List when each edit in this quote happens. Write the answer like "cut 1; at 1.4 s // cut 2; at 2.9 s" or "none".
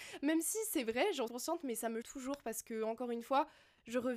cut 1; at 1.3 s // cut 2; at 2.0 s